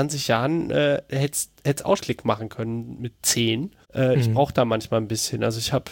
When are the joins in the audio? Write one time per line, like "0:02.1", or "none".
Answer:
0:02.0
0:03.8